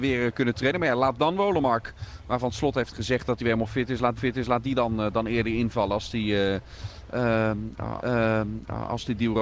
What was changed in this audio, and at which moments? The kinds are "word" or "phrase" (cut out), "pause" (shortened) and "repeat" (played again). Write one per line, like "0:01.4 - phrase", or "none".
0:04.2 - repeat
0:08.0 - repeat